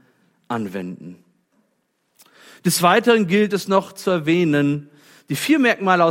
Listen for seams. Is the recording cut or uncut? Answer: uncut